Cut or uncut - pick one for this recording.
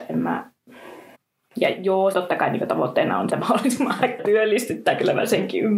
cut